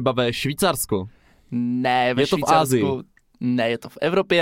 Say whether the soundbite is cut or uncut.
uncut